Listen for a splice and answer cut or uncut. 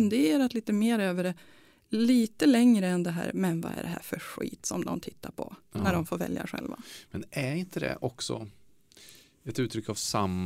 uncut